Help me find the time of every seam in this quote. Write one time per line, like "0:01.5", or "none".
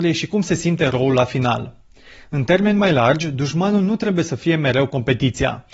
none